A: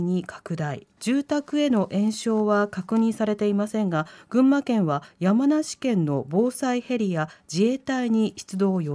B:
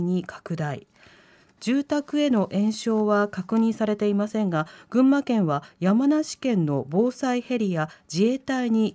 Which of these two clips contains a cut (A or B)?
A